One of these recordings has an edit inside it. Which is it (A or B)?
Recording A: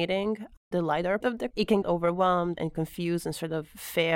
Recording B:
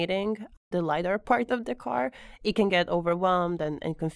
A